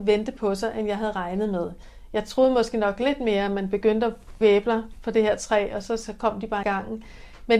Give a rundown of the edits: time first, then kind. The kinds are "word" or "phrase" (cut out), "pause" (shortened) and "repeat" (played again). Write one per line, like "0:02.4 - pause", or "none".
0:04.4 - word
0:06.6 - phrase